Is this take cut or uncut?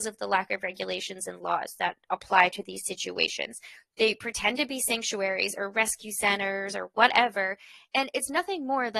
uncut